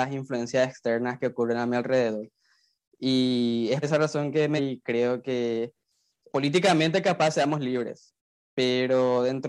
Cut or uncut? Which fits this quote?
cut